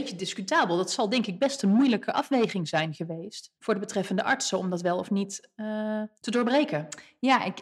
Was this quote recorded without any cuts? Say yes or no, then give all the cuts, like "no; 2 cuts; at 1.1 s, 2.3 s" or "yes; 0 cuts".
no; 2 cuts; at 3.6 s, 6.2 s